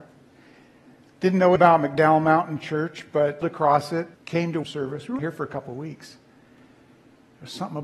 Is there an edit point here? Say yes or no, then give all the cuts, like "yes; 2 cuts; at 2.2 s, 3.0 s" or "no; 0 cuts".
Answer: yes; 5 cuts; at 1.6 s, 3.4 s, 4.1 s, 4.6 s, 5.2 s